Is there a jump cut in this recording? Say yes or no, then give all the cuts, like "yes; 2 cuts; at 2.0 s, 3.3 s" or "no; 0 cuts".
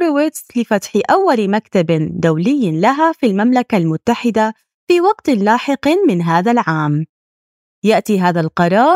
no; 0 cuts